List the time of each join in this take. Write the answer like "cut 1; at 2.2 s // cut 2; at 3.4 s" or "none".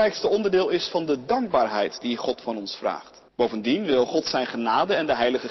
cut 1; at 3.3 s